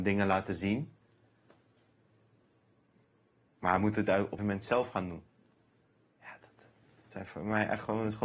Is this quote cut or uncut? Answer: cut